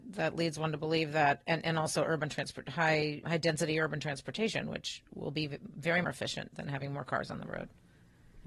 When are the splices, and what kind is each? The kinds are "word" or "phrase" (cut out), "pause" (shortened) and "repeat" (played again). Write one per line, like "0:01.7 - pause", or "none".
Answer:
0:03.2 - word
0:06.0 - phrase